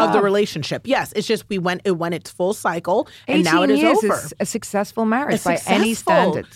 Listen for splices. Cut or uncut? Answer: uncut